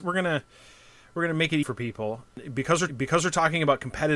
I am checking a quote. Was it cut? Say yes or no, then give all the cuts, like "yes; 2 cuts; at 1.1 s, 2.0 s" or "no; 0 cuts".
yes; 2 cuts; at 1.6 s, 2.9 s